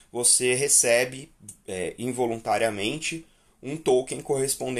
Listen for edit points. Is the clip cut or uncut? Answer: uncut